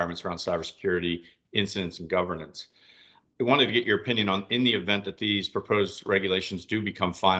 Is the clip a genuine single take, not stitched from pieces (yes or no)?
yes